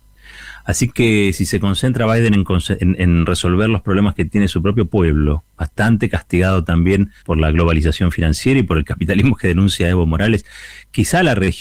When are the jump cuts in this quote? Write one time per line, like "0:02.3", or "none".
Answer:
0:05.5
0:07.2